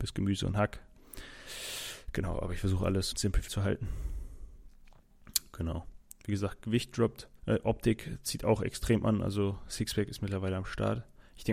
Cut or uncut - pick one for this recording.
cut